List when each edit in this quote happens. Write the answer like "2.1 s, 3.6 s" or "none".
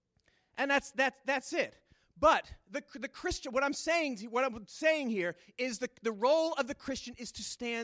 none